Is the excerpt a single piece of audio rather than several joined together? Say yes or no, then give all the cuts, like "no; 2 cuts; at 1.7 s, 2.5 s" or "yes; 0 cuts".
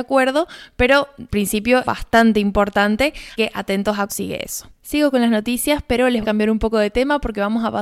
no; 6 cuts; at 1.3 s, 1.8 s, 3.4 s, 4.1 s, 4.7 s, 6.2 s